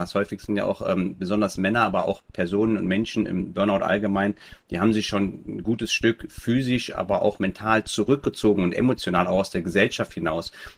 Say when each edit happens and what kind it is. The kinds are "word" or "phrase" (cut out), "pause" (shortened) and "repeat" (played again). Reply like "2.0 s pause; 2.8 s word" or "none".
none